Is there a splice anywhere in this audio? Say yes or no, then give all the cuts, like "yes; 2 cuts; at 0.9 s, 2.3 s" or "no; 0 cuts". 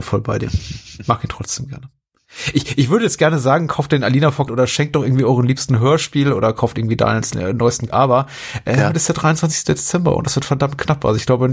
yes; 2 cuts; at 4.5 s, 7.9 s